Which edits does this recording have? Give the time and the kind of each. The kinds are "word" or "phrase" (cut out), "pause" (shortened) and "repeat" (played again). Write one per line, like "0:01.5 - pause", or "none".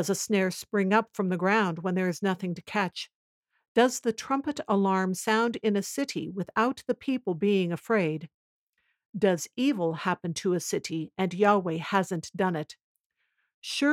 none